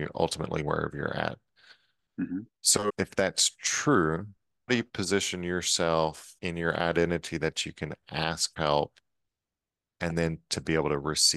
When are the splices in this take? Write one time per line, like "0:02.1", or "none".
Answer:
0:02.9
0:04.7
0:06.4
0:08.5